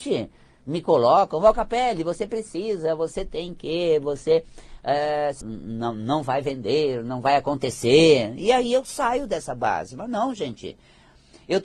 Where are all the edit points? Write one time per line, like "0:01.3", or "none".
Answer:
0:05.4